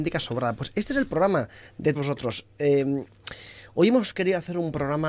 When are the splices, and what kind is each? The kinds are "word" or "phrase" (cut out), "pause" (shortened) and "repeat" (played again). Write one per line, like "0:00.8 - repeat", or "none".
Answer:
0:01.9 - word